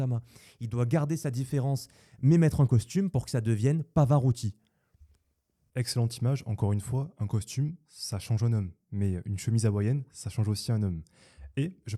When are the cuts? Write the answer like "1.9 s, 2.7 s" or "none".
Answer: none